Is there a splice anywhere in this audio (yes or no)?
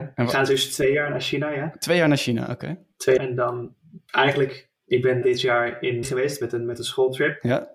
yes